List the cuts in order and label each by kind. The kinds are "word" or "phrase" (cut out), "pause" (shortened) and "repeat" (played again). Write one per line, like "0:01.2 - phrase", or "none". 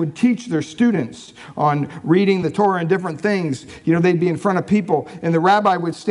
none